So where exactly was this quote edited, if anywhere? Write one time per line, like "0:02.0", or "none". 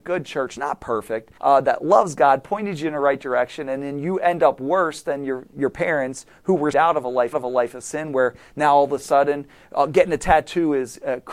0:01.4
0:06.7
0:07.3